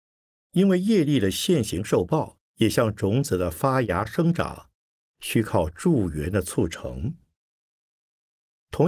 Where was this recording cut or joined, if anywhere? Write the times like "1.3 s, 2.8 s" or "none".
2.5 s